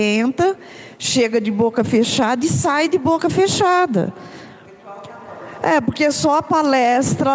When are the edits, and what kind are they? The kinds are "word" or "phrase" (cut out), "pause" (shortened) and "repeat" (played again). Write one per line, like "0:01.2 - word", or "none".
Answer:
none